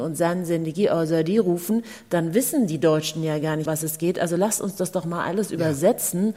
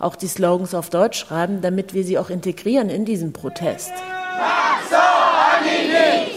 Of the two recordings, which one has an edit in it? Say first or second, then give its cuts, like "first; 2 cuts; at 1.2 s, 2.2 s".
first; 1 cut; at 3.7 s